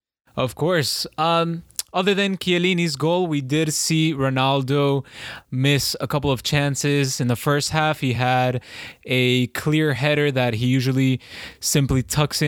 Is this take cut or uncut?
uncut